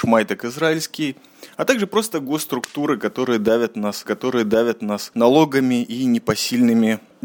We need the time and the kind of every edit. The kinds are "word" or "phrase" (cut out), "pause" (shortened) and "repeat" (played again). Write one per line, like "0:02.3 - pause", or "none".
0:04.1 - repeat